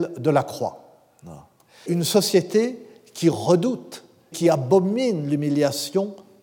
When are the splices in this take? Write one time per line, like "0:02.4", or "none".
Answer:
0:01.9
0:04.3